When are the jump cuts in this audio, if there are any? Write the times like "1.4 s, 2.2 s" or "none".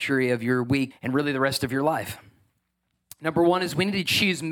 0.9 s